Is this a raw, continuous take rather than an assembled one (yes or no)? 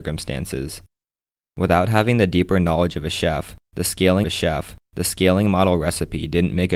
no